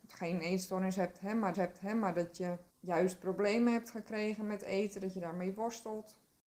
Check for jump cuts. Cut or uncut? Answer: cut